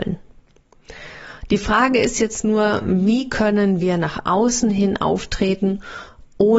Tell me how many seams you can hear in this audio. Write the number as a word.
zero